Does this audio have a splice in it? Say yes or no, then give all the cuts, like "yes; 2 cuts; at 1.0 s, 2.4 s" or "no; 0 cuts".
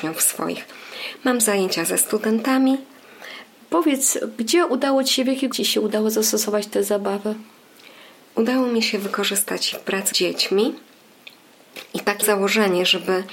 yes; 5 cuts; at 1.4 s, 5.5 s, 9.7 s, 10.1 s, 12.2 s